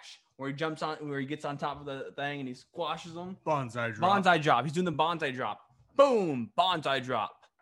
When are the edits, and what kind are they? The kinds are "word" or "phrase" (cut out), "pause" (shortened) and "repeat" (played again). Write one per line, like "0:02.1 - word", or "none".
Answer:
none